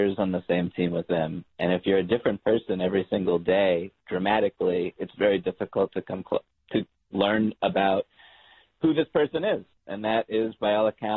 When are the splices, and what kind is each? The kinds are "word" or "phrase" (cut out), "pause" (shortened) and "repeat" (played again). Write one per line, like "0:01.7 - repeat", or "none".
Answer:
none